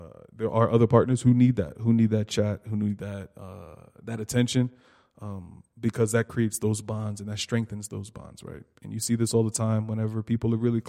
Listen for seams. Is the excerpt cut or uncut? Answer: uncut